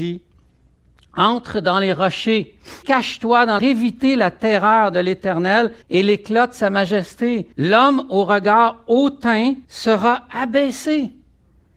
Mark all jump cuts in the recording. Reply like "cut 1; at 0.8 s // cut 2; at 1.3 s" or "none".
cut 1; at 2.8 s // cut 2; at 3.6 s // cut 3; at 5.8 s // cut 4; at 7.5 s // cut 5; at 9.6 s